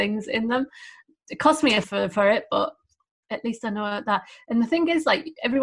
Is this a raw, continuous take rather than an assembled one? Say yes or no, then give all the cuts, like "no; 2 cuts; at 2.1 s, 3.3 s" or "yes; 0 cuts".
no; 1 cut; at 1.8 s